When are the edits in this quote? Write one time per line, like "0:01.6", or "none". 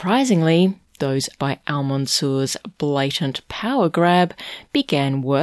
0:01.4